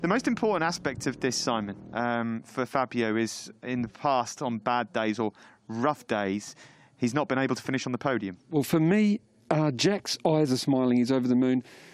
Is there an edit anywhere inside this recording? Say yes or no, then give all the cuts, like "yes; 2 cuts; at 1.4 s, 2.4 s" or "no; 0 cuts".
no; 0 cuts